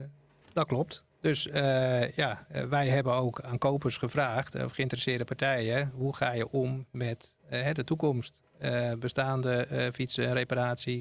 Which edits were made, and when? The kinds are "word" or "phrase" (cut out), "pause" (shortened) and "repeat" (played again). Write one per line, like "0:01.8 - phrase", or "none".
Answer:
none